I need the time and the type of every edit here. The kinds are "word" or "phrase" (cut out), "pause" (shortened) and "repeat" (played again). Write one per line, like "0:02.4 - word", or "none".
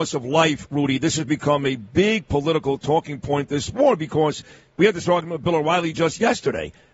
none